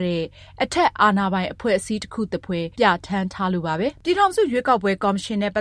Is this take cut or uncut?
cut